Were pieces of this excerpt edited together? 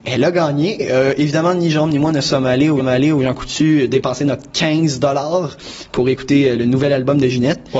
yes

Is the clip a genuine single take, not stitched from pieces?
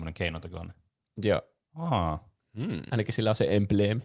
yes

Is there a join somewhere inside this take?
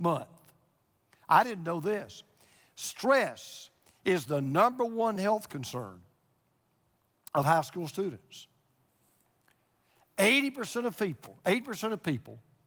no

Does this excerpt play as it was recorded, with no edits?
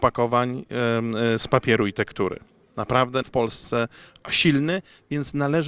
no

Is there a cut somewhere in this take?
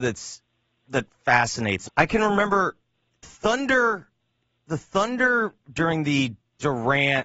yes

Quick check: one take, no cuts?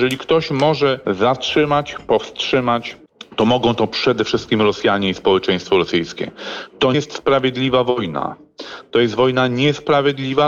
no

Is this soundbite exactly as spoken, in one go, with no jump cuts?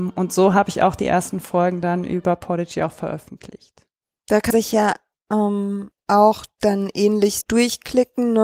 no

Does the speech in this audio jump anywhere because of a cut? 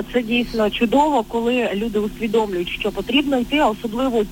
no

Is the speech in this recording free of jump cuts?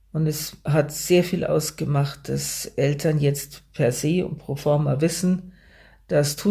yes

